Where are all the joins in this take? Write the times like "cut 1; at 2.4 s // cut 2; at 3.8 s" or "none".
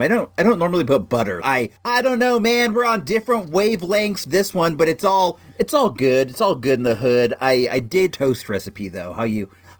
cut 1; at 1.4 s // cut 2; at 1.8 s // cut 3; at 4.2 s // cut 4; at 8.1 s